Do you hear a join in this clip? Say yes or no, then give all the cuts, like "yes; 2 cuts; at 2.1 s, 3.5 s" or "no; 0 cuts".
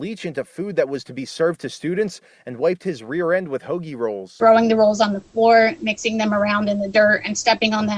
no; 0 cuts